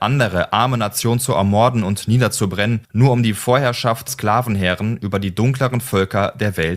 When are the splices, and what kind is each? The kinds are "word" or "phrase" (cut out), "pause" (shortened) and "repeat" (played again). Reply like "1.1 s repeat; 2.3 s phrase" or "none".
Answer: 2.8 s pause; 4.1 s word